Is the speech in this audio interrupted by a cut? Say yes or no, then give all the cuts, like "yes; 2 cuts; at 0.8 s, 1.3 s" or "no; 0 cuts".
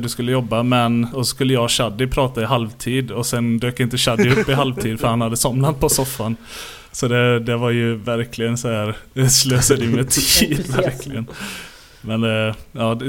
yes; 1 cut; at 6.9 s